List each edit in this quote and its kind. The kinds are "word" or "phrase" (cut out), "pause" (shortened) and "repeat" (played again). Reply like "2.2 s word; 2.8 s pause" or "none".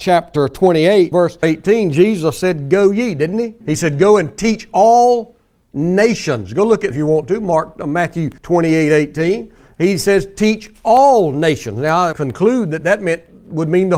1.1 s word; 1.4 s word; 3.6 s pause; 6.9 s word; 8.4 s pause; 12.1 s phrase